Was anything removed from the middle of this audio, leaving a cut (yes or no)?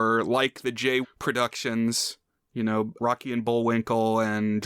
yes